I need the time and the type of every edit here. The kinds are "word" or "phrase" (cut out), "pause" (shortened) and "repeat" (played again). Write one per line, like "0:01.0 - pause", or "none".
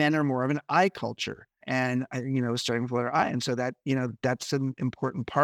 0:01.6 - word